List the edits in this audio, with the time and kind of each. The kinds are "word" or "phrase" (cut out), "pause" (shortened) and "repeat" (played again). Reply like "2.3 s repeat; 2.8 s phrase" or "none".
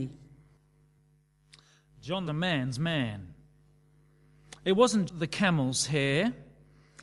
2.3 s phrase; 5.1 s word